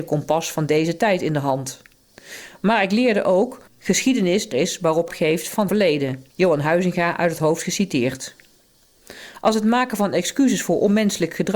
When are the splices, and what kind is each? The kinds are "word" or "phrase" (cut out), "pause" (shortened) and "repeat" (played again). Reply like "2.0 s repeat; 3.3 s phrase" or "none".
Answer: 3.7 s word; 4.5 s word; 5.1 s phrase; 5.7 s word; 6.3 s pause

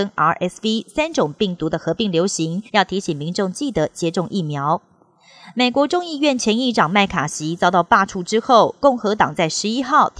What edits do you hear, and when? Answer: 2.7 s pause

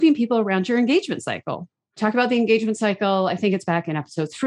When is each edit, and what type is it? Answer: none

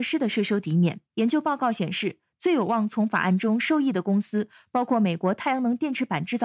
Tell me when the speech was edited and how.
1.0 s pause

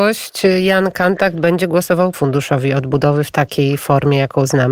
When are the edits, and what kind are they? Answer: 2.1 s word

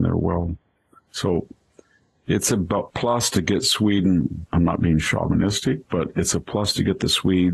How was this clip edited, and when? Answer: none

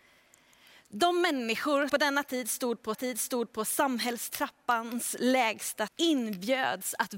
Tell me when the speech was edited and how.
1.9 s word; 2.9 s repeat; 5.9 s word

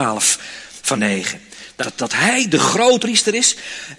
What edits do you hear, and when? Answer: 1.0 s word; 1.8 s word; 3.0 s word

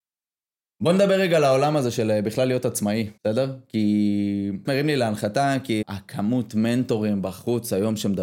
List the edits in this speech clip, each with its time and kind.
3.2 s pause; 4.7 s phrase; 5.8 s word

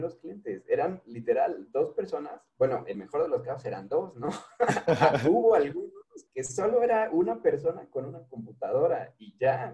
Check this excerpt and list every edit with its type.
2.9 s word; 6.3 s pause

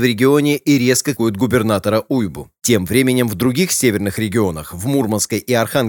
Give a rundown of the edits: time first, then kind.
1.2 s word

